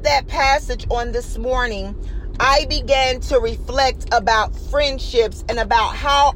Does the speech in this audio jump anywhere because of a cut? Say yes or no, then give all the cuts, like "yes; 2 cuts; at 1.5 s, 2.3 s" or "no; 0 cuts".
no; 0 cuts